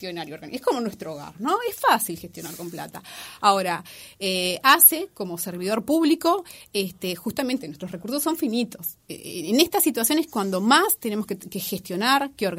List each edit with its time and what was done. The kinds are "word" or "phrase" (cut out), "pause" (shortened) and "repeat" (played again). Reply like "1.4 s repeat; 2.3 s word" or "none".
none